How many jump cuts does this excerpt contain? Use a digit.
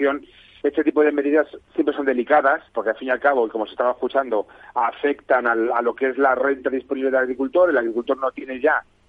2